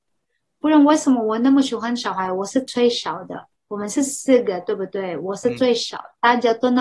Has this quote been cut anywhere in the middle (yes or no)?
yes